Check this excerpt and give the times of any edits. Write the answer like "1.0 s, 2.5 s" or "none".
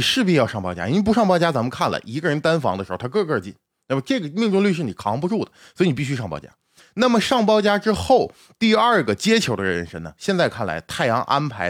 none